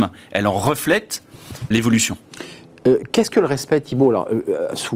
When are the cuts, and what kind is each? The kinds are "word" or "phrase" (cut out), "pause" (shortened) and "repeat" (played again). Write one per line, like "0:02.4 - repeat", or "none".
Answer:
0:01.7 - word